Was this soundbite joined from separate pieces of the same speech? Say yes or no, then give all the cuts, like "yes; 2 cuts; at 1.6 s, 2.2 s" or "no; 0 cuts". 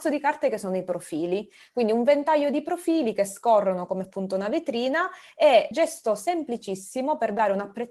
yes; 2 cuts; at 4.0 s, 5.7 s